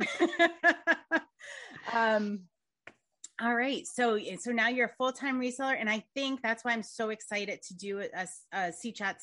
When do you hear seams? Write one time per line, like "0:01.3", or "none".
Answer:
none

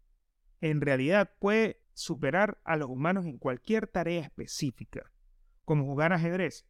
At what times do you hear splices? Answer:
0:01.8

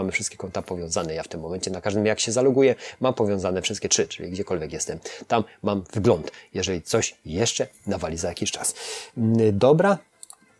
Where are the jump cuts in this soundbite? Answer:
none

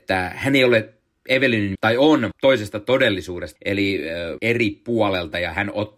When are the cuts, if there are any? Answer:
0:01.7
0:02.3
0:03.6
0:04.4

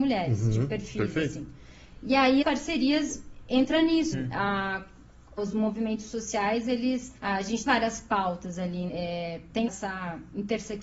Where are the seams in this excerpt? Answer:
0:02.4
0:04.1
0:05.4
0:07.2
0:07.7
0:08.9
0:09.7

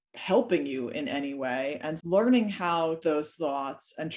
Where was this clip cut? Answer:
0:02.0
0:03.0

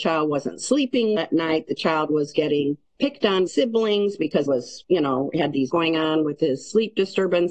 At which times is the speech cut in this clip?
0:01.2
0:02.9
0:03.5
0:04.5
0:05.7

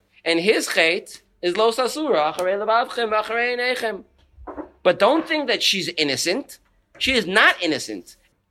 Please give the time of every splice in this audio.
none

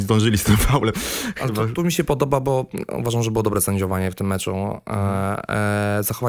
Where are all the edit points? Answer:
none

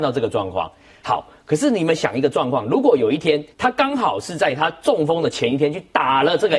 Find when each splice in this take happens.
0:03.5

